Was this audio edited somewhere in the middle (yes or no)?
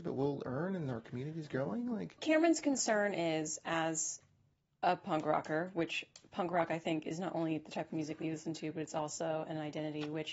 yes